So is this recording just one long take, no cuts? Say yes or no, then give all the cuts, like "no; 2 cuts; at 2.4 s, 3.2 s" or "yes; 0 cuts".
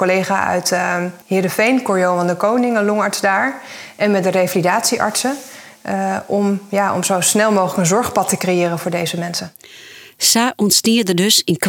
no; 1 cut; at 1.2 s